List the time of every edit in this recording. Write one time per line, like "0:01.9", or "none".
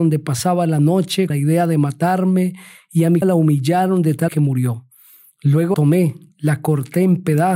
0:01.3
0:03.2
0:04.3
0:05.7